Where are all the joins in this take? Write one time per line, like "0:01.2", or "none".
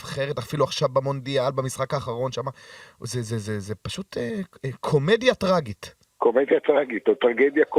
0:06.1